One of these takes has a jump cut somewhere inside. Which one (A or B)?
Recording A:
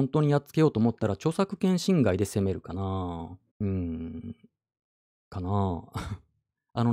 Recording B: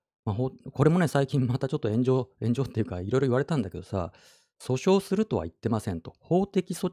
A